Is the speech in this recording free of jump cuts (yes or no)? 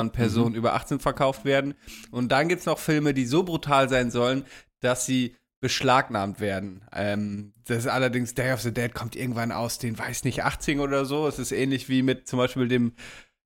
yes